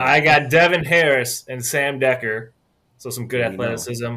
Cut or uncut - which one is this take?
uncut